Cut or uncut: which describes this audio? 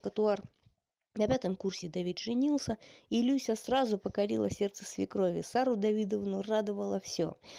uncut